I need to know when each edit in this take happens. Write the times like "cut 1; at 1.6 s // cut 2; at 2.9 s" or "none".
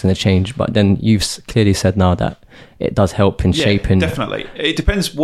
none